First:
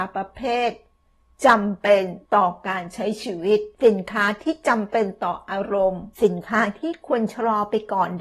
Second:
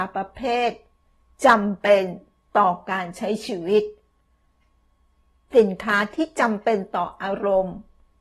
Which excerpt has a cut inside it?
first; 3 cuts; at 2.3 s, 3.7 s, 6.1 s

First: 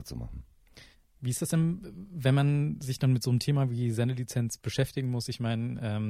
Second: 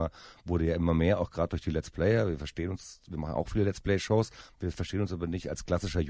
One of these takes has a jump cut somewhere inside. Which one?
first; 1 cut; at 0.9 s

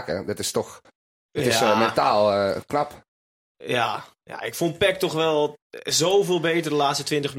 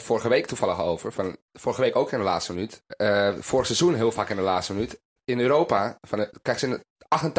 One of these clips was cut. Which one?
second; 3 cuts; at 1.4 s, 2.9 s, 5.2 s

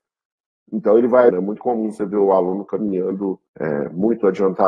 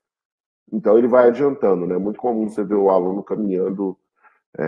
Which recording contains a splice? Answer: first; 2 cuts; at 1.3 s, 3.5 s

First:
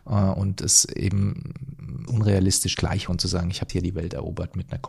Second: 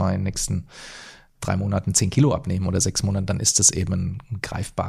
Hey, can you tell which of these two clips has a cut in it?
first; 4 cuts; at 2.1 s, 2.7 s, 3.1 s, 3.7 s

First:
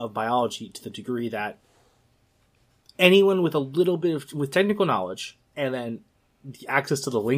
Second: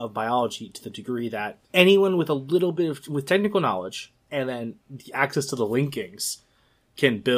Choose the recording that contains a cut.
second; 2 cuts; at 1.6 s, 4.8 s

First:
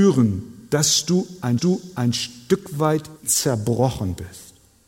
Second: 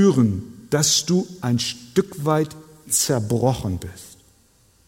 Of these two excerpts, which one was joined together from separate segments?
first; 2 cuts; at 1.6 s, 3.2 s

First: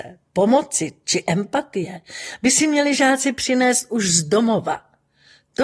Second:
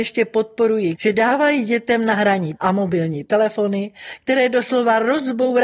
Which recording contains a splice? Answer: second; 2 cuts; at 0.9 s, 2.6 s

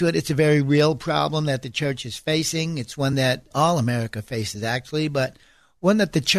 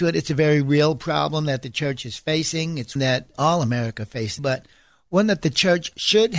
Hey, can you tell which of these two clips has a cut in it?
second; 2 cuts; at 3.0 s, 4.4 s

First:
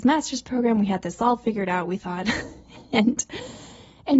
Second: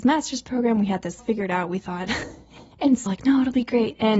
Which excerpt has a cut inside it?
second; 3 cuts; at 1.2 s, 2.7 s, 3.1 s

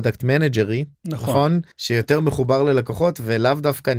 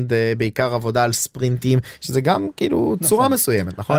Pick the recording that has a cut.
first; 2 cuts; at 0.9 s, 1.7 s

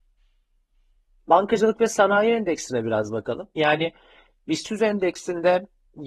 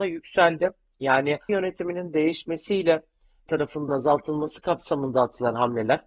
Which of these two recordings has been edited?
second; 3 cuts; at 1.5 s, 3.5 s, 3.9 s

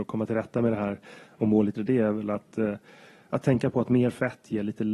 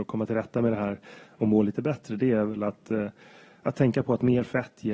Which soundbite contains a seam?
first; 1 cut; at 1.8 s

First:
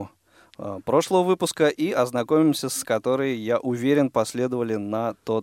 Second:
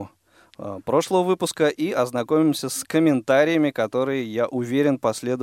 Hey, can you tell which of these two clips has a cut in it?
first; 1 cut; at 2.8 s

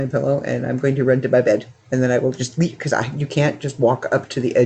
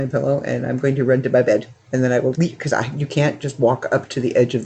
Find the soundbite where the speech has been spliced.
second; 1 cut; at 2.3 s

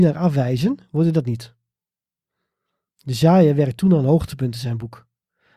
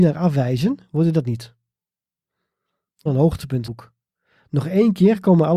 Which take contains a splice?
second; 2 cuts; at 3.1 s, 3.6 s

